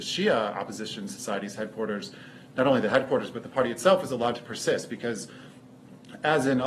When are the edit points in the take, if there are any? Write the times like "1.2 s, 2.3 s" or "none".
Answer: none